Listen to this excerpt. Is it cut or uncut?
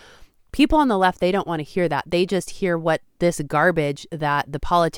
uncut